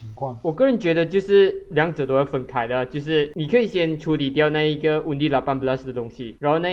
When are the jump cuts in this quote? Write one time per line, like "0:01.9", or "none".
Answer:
none